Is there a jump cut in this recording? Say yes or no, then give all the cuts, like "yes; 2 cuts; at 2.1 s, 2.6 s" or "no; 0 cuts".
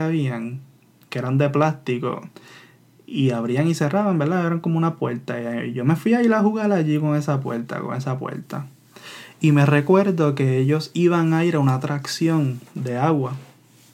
no; 0 cuts